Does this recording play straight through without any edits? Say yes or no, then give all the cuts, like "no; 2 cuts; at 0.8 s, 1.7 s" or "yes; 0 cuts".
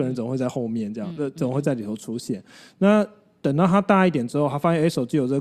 yes; 0 cuts